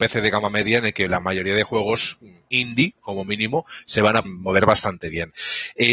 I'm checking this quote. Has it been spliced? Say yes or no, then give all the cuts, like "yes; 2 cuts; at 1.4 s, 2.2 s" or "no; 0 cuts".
yes; 1 cut; at 4.2 s